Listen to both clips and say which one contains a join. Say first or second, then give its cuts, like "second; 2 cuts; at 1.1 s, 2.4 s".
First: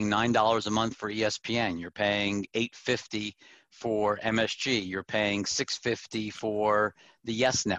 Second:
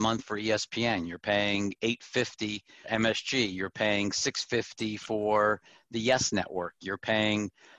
second; 1 cut; at 2.8 s